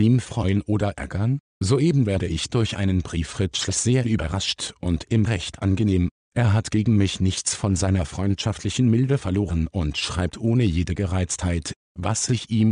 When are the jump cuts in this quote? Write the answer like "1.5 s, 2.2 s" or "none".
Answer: 5.3 s